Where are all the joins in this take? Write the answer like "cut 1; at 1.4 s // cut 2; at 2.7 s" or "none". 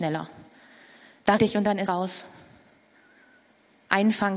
cut 1; at 1.4 s // cut 2; at 1.9 s